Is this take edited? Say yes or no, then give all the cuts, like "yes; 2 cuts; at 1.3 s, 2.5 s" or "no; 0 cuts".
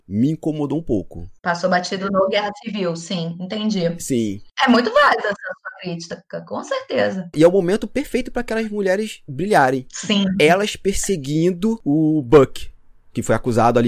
no; 0 cuts